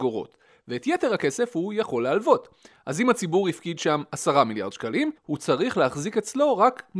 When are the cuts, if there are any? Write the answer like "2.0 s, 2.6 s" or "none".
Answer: 5.2 s